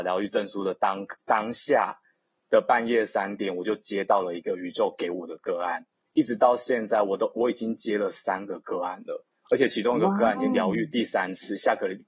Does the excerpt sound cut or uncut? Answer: uncut